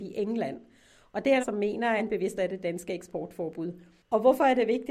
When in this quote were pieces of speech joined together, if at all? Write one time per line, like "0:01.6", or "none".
0:01.4
0:02.0
0:02.4